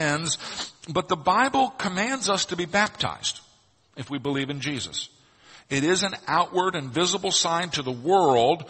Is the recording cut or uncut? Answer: uncut